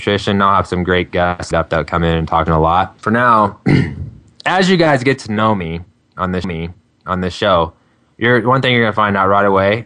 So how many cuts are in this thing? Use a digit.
4